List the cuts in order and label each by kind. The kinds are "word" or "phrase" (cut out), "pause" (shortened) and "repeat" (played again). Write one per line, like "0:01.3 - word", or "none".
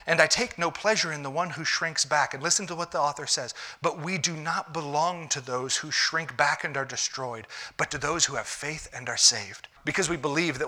0:09.8 - pause

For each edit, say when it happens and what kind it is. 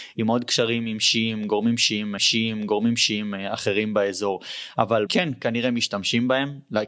0:02.2 - repeat
0:05.1 - phrase

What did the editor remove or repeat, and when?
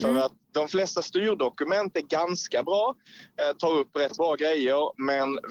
0:04.2 - word

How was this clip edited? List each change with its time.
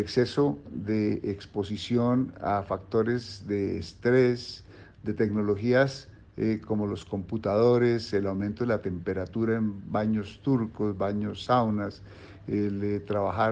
none

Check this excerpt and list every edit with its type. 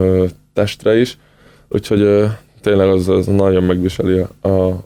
none

